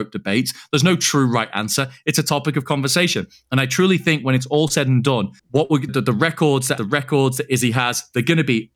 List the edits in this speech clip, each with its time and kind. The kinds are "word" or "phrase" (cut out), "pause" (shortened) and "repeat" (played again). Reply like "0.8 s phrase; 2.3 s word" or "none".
5.4 s pause; 5.9 s word; 6.8 s phrase